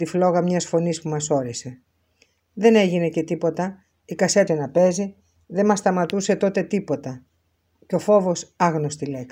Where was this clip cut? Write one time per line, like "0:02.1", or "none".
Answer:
0:04.5